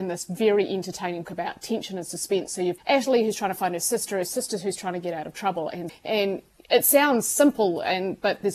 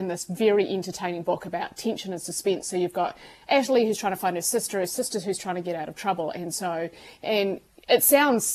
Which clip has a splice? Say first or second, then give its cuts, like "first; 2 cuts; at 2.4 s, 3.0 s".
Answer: first; 3 cuts; at 1.2 s, 2.8 s, 5.9 s